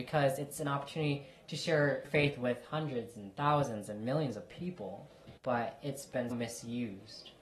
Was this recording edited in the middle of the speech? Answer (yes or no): yes